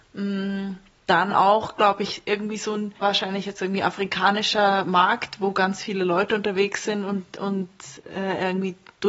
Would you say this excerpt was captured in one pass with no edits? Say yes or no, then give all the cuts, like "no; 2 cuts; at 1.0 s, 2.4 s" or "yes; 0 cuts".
no; 1 cut; at 3.0 s